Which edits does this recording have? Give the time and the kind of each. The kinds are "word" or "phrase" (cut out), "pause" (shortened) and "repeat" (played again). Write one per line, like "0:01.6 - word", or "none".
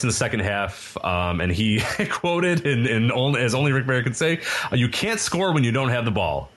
none